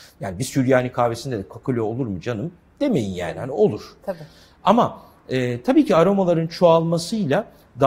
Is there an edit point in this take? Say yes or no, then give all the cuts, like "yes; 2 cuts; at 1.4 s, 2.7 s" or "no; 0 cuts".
no; 0 cuts